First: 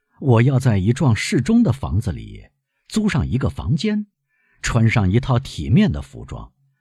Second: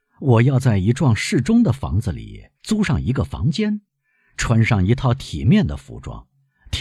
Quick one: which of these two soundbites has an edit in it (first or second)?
second